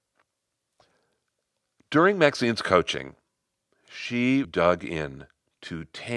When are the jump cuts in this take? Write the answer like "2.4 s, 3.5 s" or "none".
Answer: 4.4 s